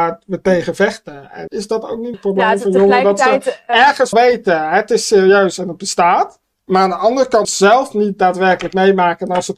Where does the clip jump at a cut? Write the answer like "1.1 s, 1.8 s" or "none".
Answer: 1.5 s, 2.1 s, 4.1 s, 6.4 s, 7.4 s